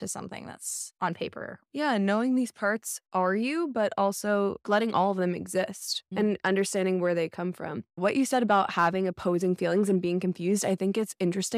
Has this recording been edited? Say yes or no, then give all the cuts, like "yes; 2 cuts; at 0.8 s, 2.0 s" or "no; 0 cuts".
yes; 1 cut; at 1.7 s